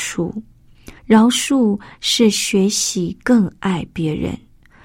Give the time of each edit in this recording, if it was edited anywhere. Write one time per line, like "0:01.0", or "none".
0:01.0